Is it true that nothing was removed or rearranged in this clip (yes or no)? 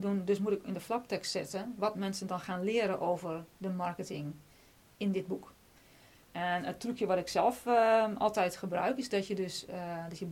yes